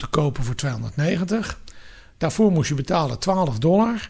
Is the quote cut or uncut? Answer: uncut